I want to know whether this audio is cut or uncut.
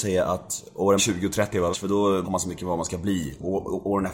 cut